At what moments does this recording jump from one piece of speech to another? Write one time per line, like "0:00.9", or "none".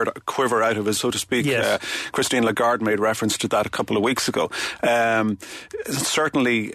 0:01.0